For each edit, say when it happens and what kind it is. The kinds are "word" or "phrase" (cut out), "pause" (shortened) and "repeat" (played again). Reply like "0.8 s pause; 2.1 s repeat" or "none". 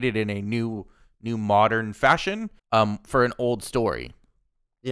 2.6 s pause